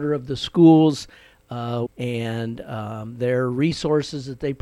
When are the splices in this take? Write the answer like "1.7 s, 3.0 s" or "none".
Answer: 1.9 s